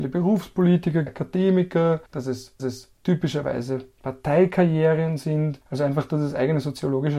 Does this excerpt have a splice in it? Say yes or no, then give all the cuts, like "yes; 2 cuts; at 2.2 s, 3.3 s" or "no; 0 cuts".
yes; 4 cuts; at 1.1 s, 2.1 s, 2.6 s, 5.6 s